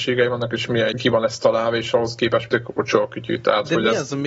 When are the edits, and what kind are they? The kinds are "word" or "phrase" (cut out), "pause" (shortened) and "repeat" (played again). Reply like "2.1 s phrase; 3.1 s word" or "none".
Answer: 0.9 s word; 2.5 s word